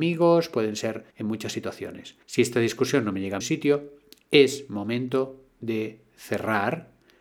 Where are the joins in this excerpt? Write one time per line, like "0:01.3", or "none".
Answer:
0:01.1
0:02.2
0:03.4